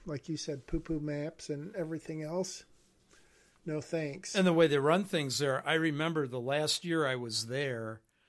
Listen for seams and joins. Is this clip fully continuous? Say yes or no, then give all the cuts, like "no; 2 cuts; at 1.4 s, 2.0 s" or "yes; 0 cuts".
yes; 0 cuts